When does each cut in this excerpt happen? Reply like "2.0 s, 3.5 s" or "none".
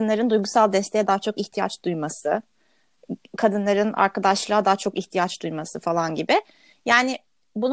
none

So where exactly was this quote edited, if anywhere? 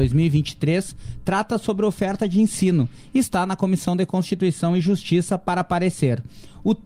none

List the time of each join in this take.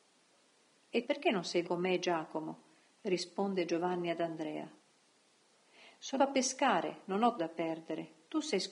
1.0 s, 1.6 s, 6.2 s, 7.4 s

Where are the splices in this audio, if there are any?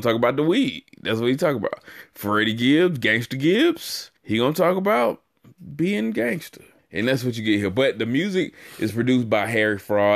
0.9 s, 4.2 s, 6.8 s

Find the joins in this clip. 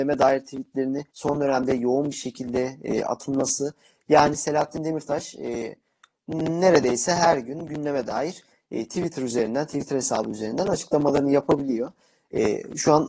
1.1 s

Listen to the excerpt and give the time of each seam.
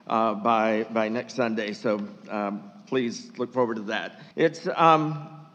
4.3 s

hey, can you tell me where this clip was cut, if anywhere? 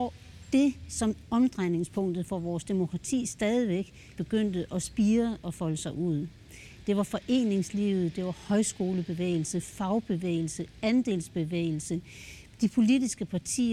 1.3 s, 4.1 s

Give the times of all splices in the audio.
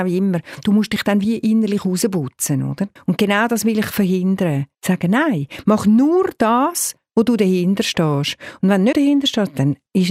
3.0 s, 4.7 s, 8.9 s

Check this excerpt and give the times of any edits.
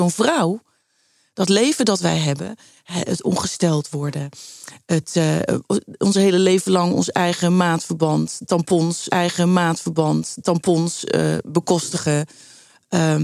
9.1 s

